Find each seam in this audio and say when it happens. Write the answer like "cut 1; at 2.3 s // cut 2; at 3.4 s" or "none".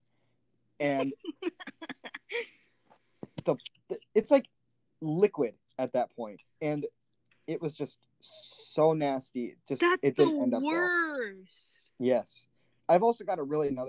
none